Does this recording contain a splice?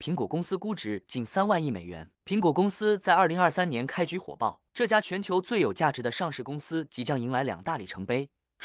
yes; 2 cuts; at 2.1 s, 4.7 s

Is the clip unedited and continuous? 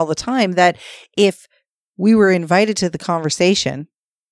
yes; 0 cuts

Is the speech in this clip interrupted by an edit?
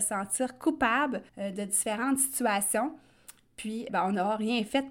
yes; 2 cuts; at 1.3 s, 3.9 s

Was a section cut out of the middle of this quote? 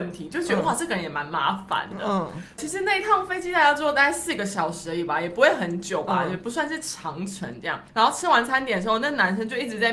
yes; 1 cut; at 7.9 s

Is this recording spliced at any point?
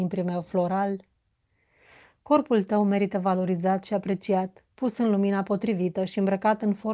no; 0 cuts

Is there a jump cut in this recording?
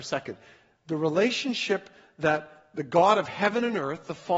no; 0 cuts

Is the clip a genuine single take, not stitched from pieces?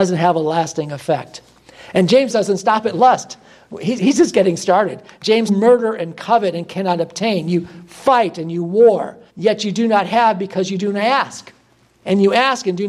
no; 5 cuts; at 2.3 s, 4.0 s, 5.5 s, 9.3 s, 11.7 s

